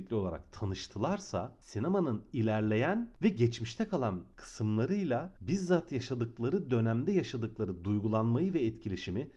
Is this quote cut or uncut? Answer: uncut